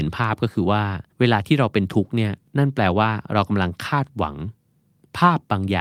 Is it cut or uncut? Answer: cut